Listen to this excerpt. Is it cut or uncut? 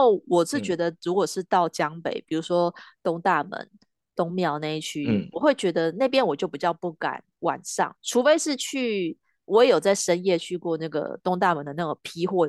uncut